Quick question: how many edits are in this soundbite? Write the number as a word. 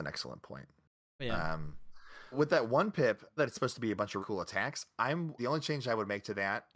four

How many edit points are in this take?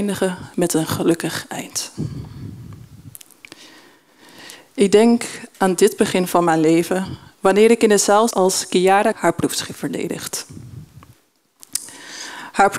two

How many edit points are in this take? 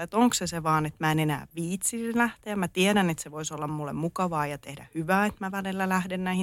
zero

